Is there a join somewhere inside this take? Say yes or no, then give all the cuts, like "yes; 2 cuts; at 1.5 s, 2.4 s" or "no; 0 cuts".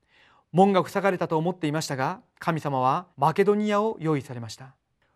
yes; 1 cut; at 3.1 s